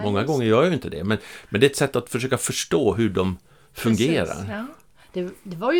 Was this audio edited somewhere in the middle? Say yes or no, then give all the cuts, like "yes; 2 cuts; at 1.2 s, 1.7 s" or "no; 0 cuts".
no; 0 cuts